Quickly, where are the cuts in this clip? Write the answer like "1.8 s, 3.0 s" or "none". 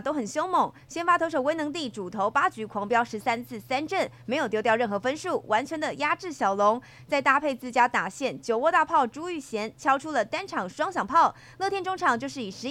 none